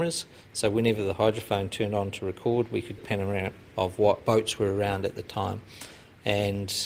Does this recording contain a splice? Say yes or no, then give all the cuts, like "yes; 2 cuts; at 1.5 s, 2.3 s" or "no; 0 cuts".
yes; 2 cuts; at 3.0 s, 3.6 s